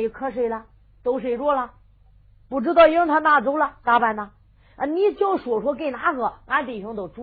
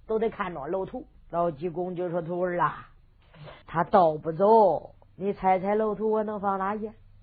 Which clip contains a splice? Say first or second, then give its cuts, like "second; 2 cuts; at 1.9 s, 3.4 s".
second; 2 cuts; at 1.2 s, 3.6 s